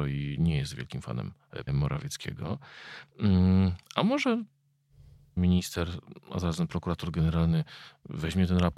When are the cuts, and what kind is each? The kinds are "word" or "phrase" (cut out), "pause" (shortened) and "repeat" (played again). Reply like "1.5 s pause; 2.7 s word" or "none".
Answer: 1.7 s word; 5.4 s phrase

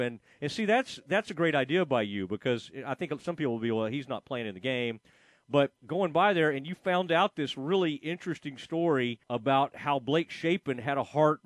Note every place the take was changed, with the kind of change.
5.8 s pause; 9.2 s pause

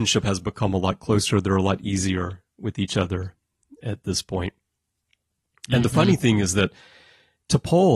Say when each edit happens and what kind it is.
none

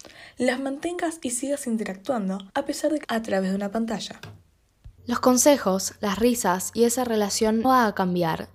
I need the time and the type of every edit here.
2.5 s pause; 3.0 s word; 5.0 s pause; 7.6 s word

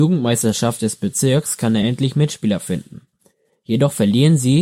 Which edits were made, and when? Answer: none

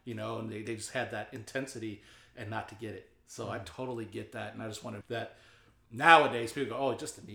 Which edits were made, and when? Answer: 5.0 s phrase

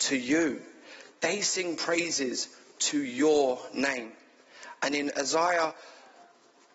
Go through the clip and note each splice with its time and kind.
none

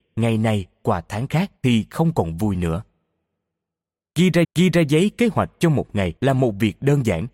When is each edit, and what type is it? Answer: 1.6 s pause; 4.4 s repeat; 6.2 s pause

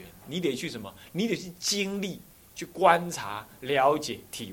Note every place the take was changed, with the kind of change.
none

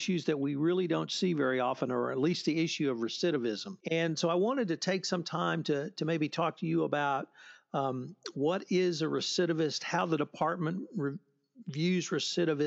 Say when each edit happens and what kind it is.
3.8 s pause

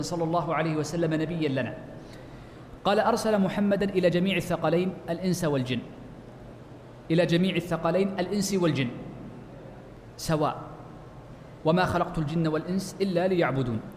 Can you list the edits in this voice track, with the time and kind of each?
none

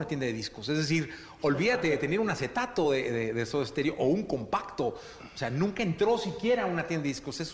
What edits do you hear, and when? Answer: none

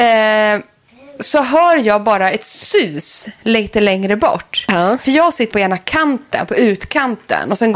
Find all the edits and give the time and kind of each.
5.5 s word

